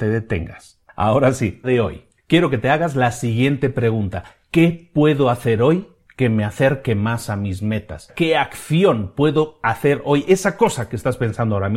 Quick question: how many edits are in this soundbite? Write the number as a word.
one